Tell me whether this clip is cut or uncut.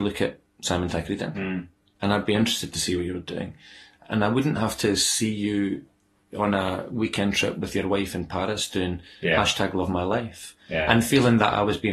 uncut